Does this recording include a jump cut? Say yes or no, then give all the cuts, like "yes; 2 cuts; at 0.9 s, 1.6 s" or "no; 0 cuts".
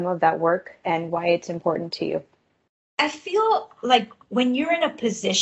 yes; 1 cut; at 2.7 s